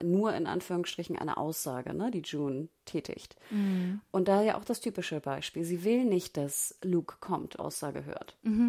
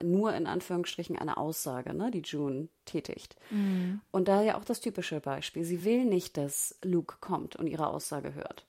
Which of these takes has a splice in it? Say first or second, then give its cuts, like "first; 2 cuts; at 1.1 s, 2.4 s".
first; 1 cut; at 7.6 s